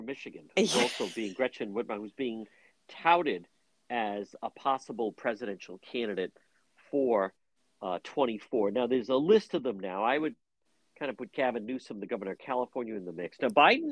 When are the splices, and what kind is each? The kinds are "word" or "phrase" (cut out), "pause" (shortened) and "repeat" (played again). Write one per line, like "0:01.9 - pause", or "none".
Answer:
none